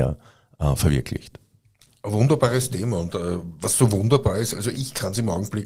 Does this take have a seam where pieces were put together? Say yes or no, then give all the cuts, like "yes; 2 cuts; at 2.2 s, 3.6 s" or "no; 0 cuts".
no; 0 cuts